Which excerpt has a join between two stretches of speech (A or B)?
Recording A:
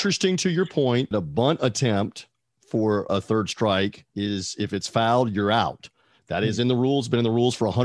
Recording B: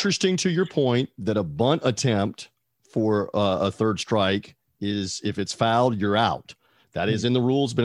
A